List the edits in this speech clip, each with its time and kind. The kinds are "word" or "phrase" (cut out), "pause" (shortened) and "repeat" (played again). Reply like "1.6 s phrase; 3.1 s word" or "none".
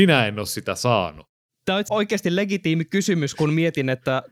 1.9 s word